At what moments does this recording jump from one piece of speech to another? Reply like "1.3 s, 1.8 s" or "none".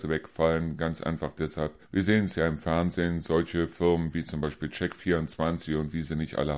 1.8 s